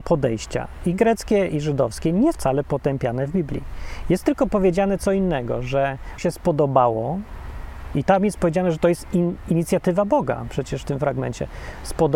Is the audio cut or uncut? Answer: cut